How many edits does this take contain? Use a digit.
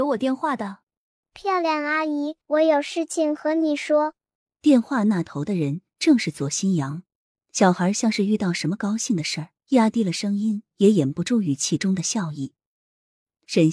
5